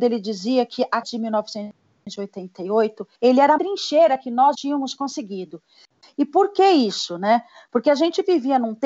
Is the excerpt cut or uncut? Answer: cut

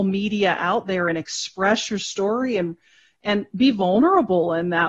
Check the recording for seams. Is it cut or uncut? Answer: uncut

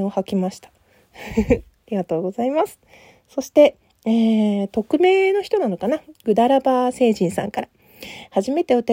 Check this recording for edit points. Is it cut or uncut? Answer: uncut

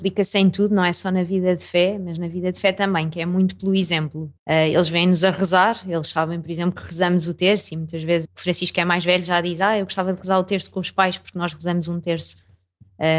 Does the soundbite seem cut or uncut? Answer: cut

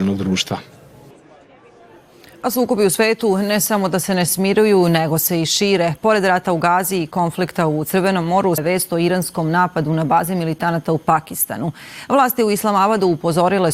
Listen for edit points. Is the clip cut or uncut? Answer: cut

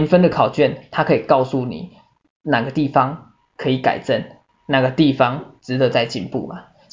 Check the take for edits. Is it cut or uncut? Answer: uncut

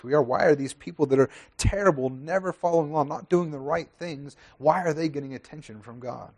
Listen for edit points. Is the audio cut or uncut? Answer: uncut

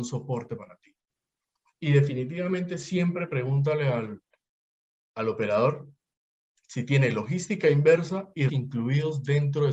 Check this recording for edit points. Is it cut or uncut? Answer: cut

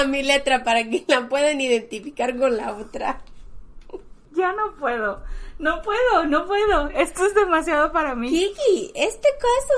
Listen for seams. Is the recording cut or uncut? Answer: uncut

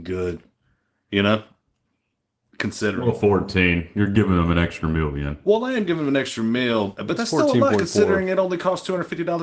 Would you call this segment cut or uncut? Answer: uncut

